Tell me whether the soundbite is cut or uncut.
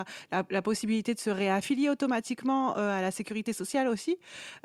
uncut